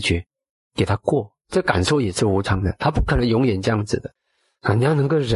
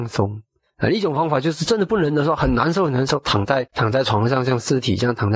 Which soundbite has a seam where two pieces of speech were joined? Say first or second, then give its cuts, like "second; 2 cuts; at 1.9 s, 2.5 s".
second; 1 cut; at 3.7 s